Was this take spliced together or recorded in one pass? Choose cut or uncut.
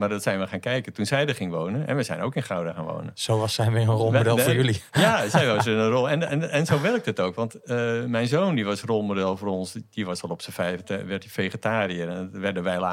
uncut